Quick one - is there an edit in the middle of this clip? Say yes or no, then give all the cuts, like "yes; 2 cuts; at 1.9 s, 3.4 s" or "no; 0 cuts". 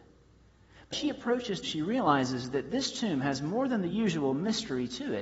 yes; 2 cuts; at 0.9 s, 1.6 s